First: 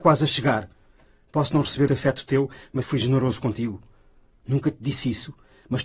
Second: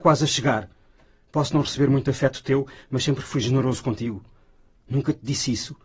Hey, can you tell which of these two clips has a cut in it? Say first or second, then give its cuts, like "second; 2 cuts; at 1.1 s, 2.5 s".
first; 2 cuts; at 1.9 s, 2.8 s